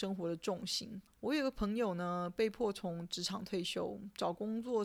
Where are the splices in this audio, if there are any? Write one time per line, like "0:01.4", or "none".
0:01.1